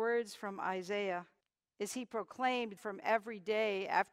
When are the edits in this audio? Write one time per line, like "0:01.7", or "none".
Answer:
0:01.4
0:02.8